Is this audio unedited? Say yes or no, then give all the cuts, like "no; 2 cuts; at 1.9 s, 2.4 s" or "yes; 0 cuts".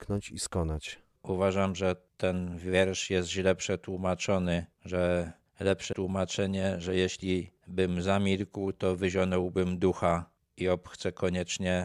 no; 1 cut; at 5.9 s